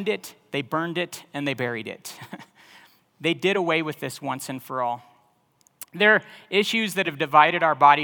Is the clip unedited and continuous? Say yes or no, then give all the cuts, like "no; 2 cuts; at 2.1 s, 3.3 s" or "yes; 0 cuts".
yes; 0 cuts